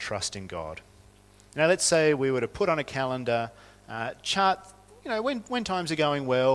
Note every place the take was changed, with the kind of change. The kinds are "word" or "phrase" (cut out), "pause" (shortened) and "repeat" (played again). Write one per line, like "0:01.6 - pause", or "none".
none

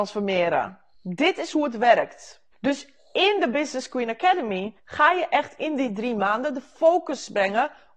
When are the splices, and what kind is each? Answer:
0:00.9 - pause
0:02.5 - pause
0:04.8 - pause

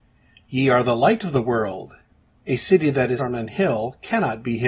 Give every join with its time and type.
0:03.2 - word

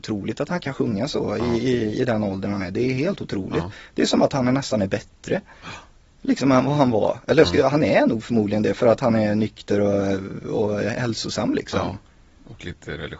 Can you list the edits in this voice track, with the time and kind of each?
none

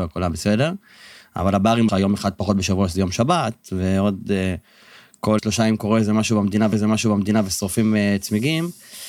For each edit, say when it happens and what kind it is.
0:01.9 - phrase
0:05.4 - word
0:06.7 - repeat

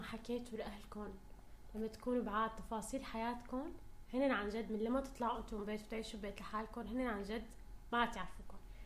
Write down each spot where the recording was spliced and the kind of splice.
none

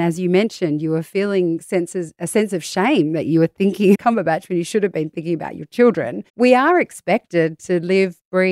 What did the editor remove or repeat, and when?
0:03.9 - phrase
0:06.3 - pause

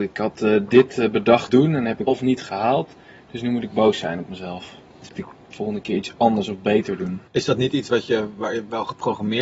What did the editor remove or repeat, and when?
0:01.5 - word
0:02.1 - word
0:05.1 - phrase
0:07.3 - pause

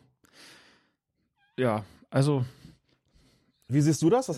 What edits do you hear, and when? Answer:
none

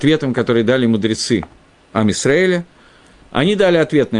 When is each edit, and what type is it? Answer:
none

